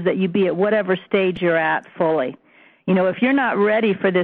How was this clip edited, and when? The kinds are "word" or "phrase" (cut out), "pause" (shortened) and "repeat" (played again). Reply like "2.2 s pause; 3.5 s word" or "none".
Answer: none